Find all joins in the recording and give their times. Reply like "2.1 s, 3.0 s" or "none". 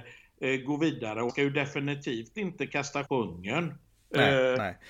1.3 s, 3.0 s